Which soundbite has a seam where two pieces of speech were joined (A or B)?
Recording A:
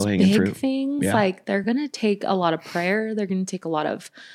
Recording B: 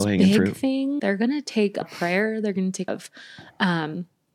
B